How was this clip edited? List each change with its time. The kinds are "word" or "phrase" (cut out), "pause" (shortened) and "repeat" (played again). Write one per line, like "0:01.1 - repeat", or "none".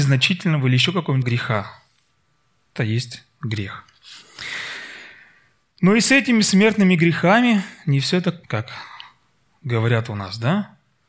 0:01.2 - word
0:02.8 - word
0:08.4 - word